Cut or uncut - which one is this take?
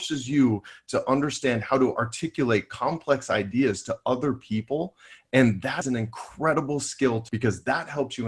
cut